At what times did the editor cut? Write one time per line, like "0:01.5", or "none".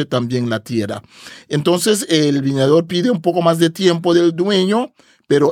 none